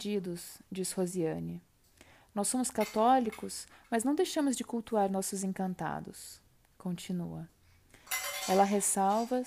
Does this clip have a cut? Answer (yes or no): no